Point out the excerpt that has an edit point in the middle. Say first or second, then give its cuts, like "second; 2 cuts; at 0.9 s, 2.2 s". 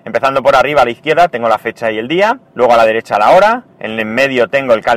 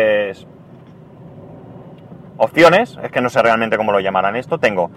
first; 2 cuts; at 2.5 s, 3.7 s